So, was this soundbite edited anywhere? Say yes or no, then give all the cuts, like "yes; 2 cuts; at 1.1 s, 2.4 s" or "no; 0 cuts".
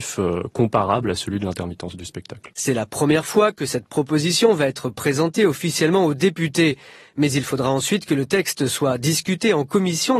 no; 0 cuts